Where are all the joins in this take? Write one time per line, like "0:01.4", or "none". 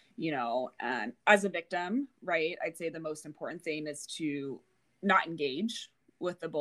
none